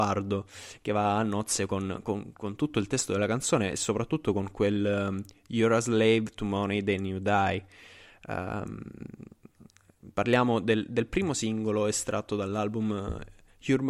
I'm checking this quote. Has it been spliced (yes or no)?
no